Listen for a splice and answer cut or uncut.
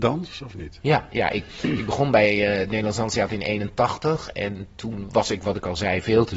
cut